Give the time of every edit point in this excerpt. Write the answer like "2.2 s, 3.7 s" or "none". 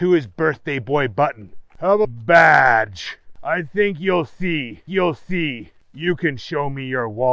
2.0 s, 4.9 s